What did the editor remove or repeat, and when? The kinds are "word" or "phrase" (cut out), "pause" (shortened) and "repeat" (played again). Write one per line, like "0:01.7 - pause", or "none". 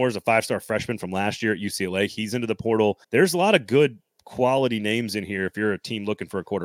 0:03.0 - pause